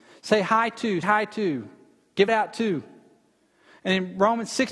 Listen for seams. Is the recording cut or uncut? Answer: cut